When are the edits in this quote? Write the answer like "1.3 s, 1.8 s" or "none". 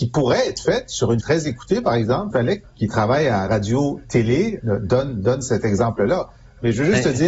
1.2 s, 2.3 s, 2.6 s, 3.5 s, 4.6 s